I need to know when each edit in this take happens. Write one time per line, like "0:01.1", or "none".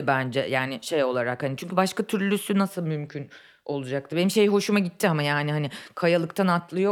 none